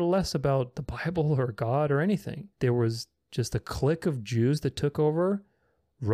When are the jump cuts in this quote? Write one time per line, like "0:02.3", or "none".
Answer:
0:02.5